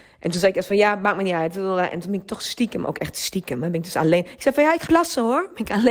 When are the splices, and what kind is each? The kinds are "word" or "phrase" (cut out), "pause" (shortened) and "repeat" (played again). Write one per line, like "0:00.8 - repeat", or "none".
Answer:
0:04.9 - word